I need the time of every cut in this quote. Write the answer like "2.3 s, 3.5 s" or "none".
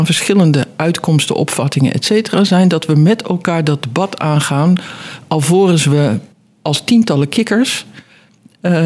6.3 s